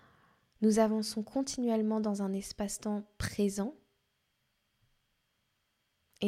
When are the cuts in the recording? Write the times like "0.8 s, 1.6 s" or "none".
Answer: none